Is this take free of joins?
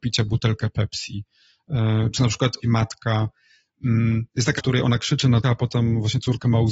no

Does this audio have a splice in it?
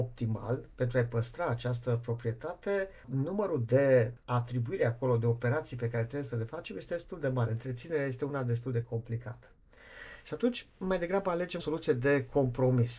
yes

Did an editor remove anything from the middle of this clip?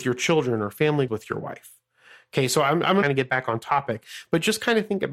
yes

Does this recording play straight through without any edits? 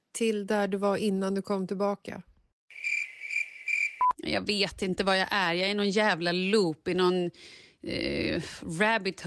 yes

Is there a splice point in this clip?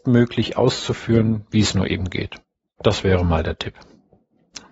no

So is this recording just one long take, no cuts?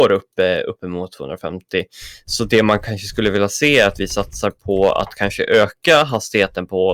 yes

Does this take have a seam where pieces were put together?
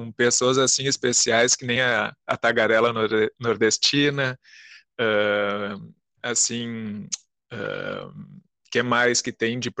no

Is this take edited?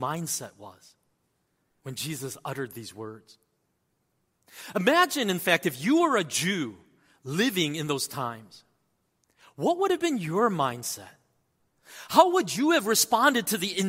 no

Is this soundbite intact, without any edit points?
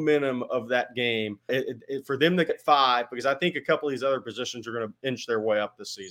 no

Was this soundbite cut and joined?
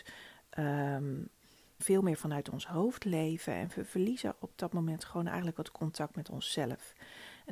yes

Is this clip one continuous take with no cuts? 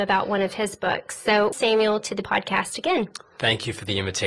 no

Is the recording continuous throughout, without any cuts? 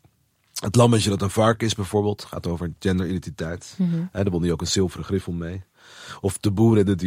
yes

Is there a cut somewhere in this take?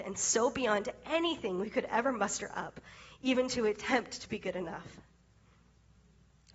no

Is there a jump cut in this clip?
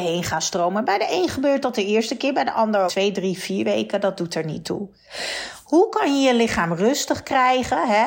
yes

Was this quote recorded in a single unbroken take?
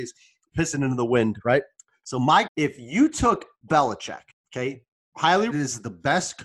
no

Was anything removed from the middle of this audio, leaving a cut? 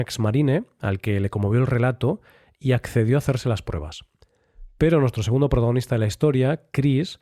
no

